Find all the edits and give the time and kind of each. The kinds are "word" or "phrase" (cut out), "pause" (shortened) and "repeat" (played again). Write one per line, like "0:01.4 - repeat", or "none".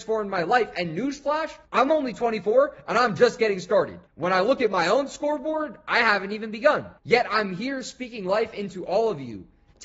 0:01.6 - pause
0:04.1 - pause
0:07.0 - pause

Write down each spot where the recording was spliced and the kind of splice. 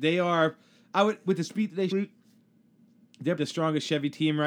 0:01.3 - word
0:01.9 - phrase
0:03.4 - word

